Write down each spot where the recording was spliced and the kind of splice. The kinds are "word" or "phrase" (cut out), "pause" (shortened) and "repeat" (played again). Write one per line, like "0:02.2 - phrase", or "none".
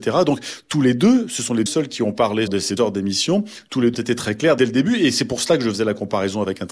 0:01.7 - word
0:02.5 - phrase
0:02.8 - word
0:03.9 - word